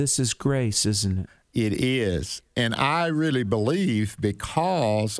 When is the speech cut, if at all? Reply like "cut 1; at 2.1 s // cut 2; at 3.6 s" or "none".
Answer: none